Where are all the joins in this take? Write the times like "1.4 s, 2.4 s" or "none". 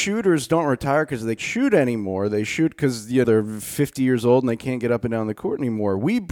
1.4 s, 3.2 s